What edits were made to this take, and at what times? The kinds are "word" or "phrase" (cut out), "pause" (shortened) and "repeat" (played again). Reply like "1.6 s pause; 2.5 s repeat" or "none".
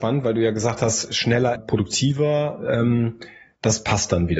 1.6 s word